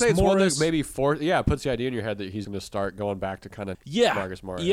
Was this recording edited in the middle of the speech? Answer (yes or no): yes